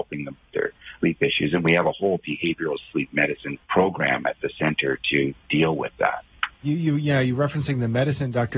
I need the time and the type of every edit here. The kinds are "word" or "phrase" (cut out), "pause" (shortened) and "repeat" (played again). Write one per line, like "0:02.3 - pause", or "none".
0:01.0 - word
0:03.6 - pause
0:06.5 - pause